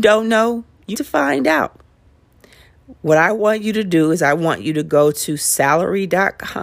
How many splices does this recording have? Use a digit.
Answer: 1